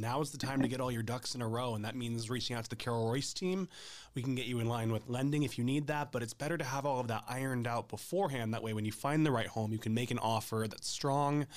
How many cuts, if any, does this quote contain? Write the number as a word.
one